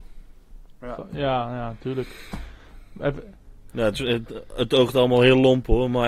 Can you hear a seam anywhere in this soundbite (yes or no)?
no